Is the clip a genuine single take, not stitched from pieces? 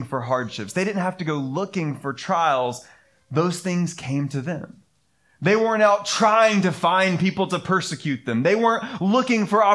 yes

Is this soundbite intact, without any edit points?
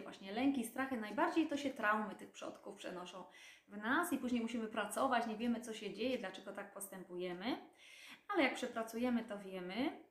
yes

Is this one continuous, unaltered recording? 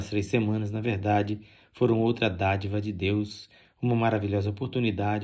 yes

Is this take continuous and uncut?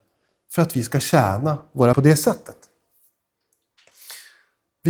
no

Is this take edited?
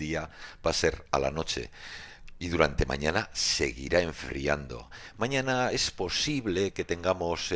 no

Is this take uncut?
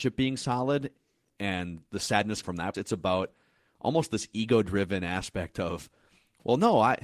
no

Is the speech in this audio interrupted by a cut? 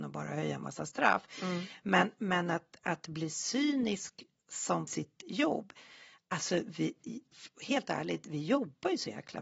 yes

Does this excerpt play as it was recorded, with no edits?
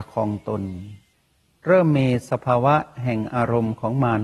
no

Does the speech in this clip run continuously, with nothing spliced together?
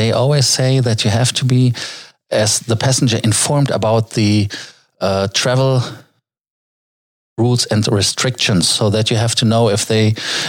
yes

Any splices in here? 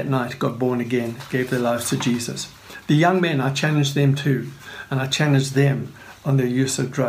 no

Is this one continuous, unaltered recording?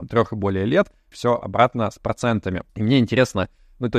no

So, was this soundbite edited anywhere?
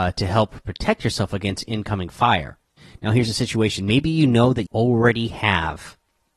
yes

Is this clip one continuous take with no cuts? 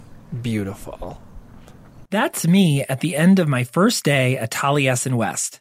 no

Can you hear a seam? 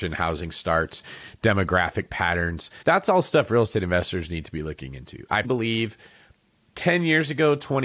yes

